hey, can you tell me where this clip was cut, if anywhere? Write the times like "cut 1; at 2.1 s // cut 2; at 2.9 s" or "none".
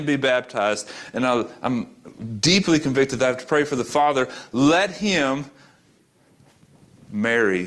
none

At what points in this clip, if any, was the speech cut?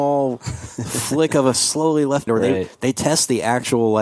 cut 1; at 1.5 s // cut 2; at 2.3 s

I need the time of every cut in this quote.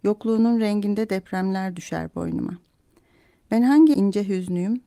cut 1; at 3.9 s

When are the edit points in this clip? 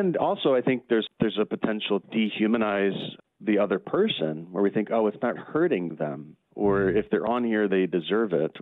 cut 1; at 1.1 s // cut 2; at 2.0 s // cut 3; at 3.2 s // cut 4; at 5.4 s // cut 5; at 6.4 s // cut 6; at 7.7 s

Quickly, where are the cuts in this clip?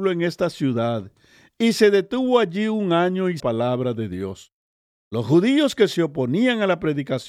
cut 1; at 3.4 s

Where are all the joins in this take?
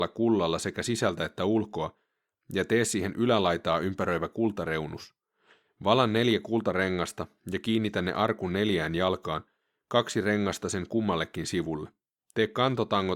none

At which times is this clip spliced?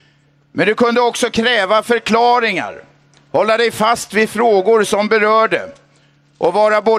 none

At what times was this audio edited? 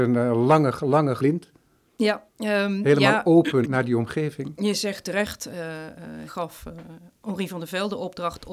cut 1; at 1.2 s // cut 2; at 2.3 s // cut 3; at 3.6 s // cut 4; at 5.0 s // cut 5; at 6.3 s

